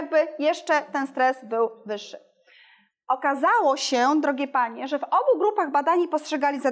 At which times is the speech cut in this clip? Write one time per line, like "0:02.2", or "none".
none